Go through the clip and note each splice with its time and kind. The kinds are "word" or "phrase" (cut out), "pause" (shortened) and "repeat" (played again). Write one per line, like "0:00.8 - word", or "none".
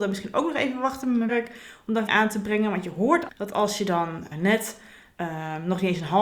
0:01.3 - word
0:02.1 - word
0:03.3 - word
0:04.3 - word